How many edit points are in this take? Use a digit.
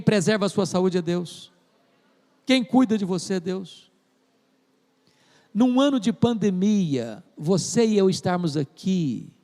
0